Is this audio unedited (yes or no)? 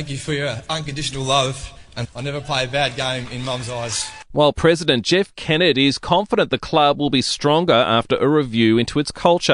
no